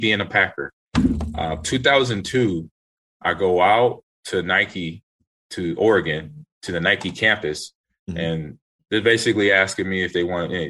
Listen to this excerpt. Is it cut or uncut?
uncut